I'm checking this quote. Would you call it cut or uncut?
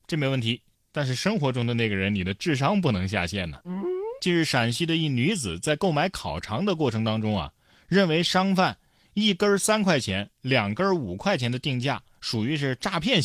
uncut